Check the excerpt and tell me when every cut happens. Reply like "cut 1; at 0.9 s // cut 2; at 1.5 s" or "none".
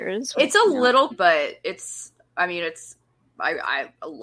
cut 1; at 1.1 s